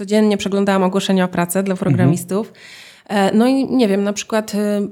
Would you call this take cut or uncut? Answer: uncut